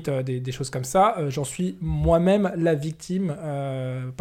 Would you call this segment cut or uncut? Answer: uncut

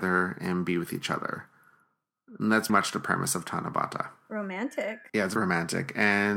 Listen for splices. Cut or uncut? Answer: cut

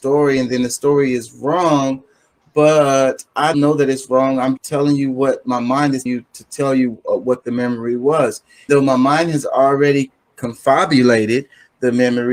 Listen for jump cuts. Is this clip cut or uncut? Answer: cut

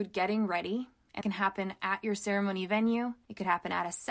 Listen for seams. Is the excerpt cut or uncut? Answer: cut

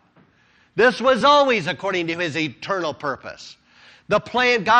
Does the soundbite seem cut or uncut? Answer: uncut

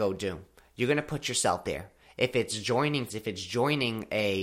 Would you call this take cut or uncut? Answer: cut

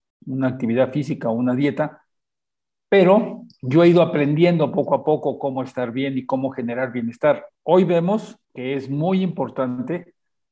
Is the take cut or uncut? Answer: cut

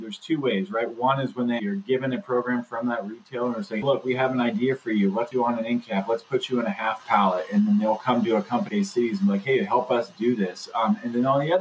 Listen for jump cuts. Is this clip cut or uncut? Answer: cut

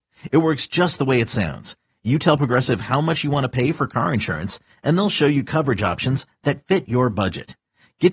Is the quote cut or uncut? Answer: uncut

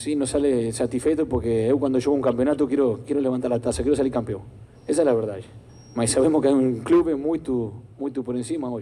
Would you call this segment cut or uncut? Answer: cut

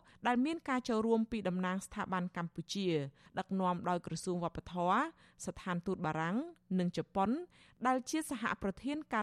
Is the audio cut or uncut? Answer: uncut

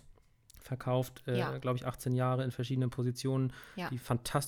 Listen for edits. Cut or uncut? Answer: uncut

